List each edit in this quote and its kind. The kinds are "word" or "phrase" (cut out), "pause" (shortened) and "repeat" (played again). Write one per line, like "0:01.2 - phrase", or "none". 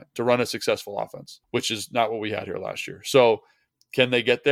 0:01.4 - pause